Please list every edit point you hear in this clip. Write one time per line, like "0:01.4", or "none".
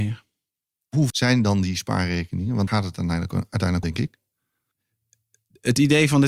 0:01.1
0:02.7
0:03.8